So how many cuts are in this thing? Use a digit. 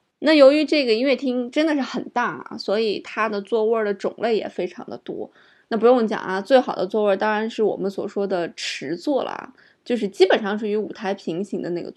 0